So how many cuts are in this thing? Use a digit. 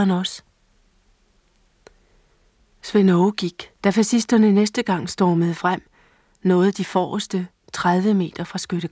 1